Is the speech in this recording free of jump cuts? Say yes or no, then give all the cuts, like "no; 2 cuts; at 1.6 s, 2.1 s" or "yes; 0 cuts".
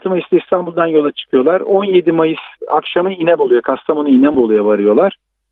no; 1 cut; at 2.6 s